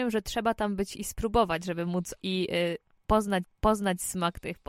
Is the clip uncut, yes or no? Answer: no